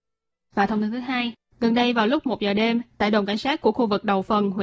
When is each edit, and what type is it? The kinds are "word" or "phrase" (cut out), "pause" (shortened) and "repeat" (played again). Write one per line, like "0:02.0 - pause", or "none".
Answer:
none